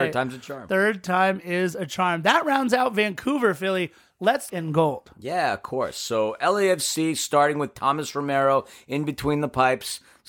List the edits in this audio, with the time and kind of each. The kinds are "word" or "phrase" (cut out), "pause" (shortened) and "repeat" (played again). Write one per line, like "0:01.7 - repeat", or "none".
0:04.5 - phrase